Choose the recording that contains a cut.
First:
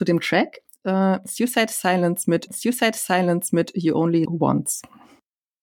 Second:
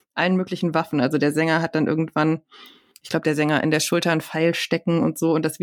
first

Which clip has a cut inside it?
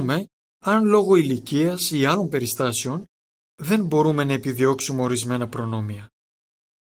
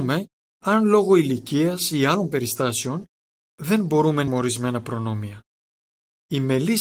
second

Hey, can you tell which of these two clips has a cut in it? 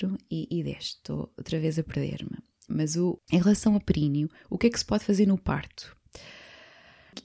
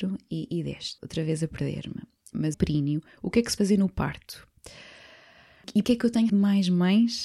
second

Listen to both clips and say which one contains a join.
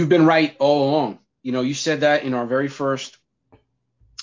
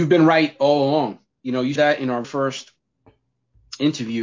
second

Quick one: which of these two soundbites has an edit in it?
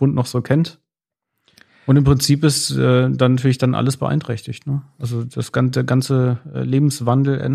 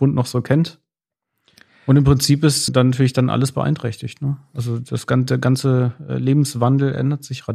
second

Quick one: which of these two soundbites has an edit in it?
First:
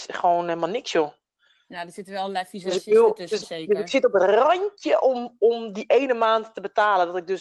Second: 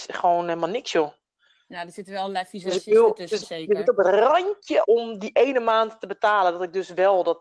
second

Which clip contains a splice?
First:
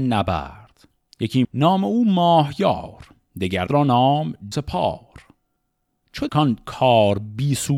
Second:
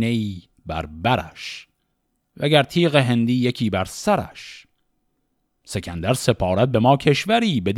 first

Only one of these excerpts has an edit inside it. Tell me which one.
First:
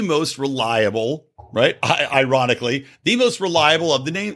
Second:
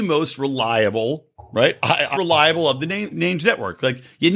second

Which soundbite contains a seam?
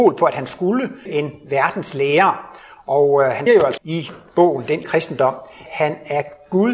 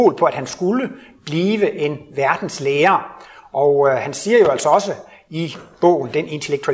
first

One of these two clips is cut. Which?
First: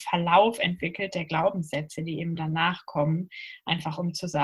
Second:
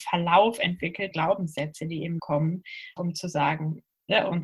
second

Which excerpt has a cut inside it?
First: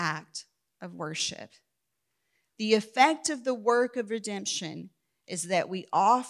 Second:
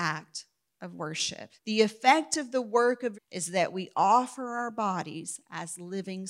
second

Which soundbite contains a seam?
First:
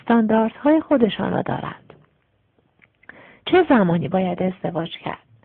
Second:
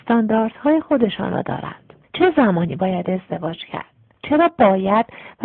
second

